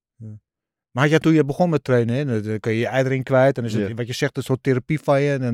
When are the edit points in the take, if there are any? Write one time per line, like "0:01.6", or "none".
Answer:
0:01.2